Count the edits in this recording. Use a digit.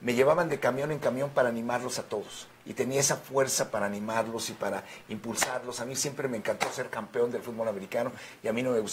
1